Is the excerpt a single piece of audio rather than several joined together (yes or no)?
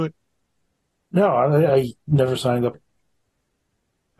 no